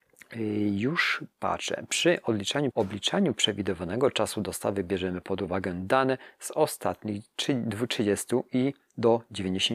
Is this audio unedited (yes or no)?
no